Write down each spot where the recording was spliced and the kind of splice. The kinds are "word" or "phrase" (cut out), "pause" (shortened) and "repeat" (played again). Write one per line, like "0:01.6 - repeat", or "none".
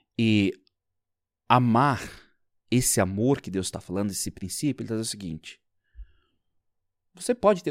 none